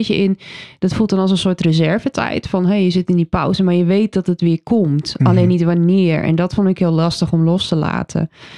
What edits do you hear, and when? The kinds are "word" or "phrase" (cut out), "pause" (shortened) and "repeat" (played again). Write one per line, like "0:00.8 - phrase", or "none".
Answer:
none